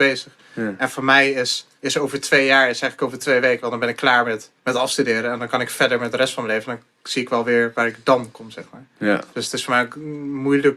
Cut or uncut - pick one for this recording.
cut